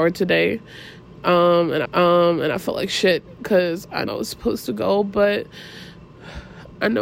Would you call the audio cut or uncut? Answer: cut